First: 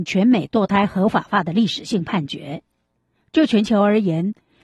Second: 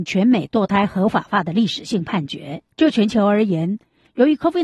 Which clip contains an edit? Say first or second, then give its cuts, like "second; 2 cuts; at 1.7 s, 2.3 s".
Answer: second; 1 cut; at 2.7 s